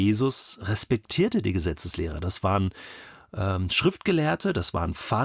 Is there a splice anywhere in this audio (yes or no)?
no